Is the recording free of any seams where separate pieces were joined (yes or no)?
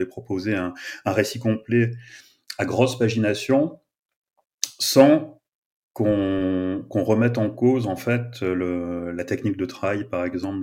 yes